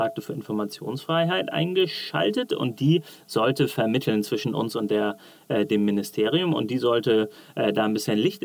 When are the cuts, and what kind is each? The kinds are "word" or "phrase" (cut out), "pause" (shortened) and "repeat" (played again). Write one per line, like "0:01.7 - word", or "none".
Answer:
none